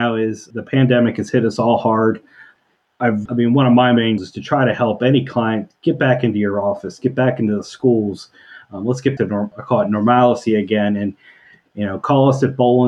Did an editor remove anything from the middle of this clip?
yes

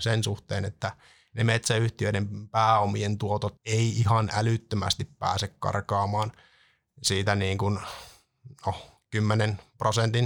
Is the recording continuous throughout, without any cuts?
no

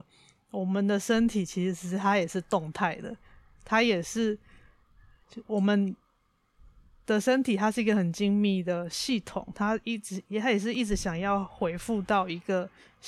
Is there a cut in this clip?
no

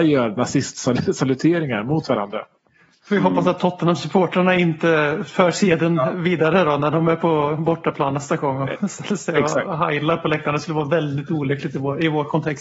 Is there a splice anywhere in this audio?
no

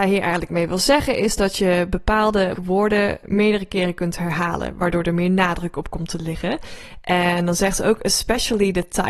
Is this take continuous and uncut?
no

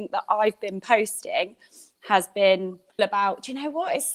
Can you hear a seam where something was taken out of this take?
yes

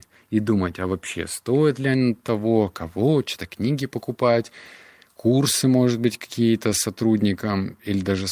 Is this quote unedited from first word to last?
yes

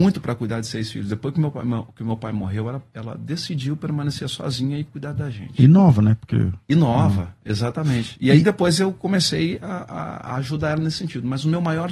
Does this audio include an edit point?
no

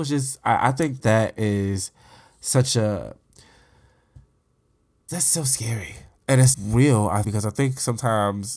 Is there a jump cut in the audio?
yes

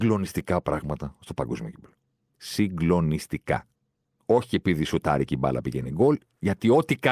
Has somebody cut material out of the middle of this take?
no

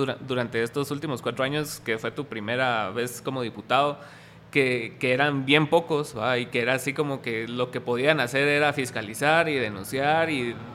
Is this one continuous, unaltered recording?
yes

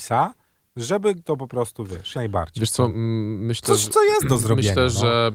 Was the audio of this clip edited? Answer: yes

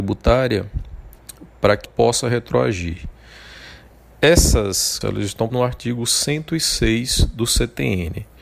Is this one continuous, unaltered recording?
no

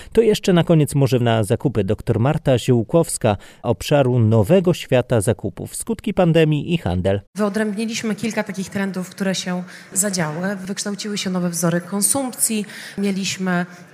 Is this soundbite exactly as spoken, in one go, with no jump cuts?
no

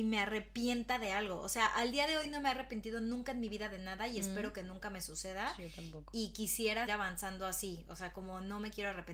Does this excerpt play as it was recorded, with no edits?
no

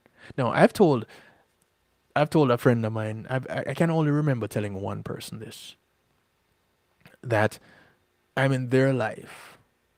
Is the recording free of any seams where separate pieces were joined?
yes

